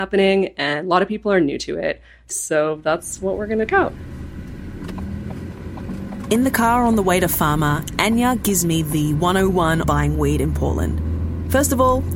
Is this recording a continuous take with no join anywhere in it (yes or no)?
no